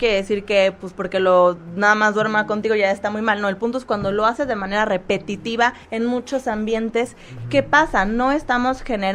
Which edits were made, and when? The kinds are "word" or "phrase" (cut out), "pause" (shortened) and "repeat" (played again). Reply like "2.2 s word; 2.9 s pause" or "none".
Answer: 5.8 s pause